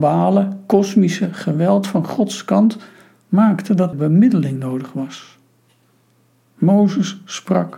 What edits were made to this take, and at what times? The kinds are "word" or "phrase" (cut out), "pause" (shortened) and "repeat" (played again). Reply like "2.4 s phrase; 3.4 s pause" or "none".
3.9 s word